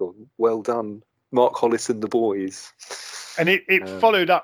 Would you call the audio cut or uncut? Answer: uncut